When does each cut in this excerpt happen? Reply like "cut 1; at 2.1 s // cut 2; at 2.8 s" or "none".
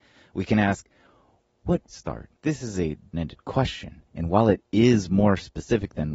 cut 1; at 1.9 s // cut 2; at 2.4 s // cut 3; at 3.1 s // cut 4; at 4.1 s